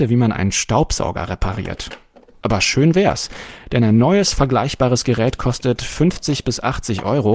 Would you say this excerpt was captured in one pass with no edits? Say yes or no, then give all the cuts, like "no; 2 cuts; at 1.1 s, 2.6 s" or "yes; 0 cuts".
yes; 0 cuts